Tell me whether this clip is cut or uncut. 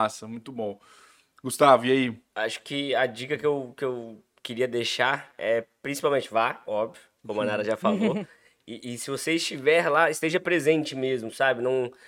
uncut